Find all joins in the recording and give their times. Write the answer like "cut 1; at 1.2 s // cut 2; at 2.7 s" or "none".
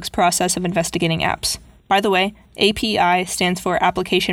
none